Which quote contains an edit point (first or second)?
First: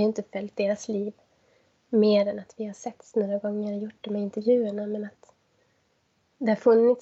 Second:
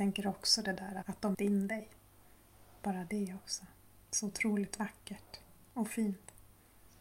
second